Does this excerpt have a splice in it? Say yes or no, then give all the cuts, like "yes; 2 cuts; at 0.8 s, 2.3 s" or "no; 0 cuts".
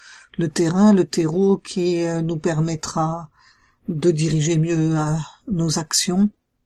no; 0 cuts